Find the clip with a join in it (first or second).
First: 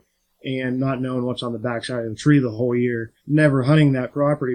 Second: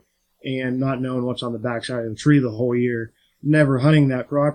first